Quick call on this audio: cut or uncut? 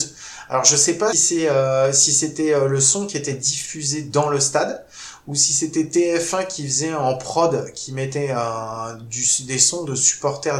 cut